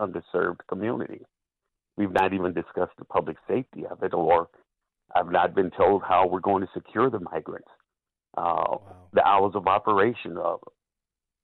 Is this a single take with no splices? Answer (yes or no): yes